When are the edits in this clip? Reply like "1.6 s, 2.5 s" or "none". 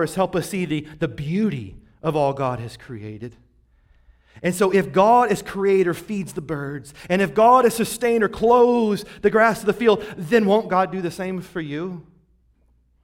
none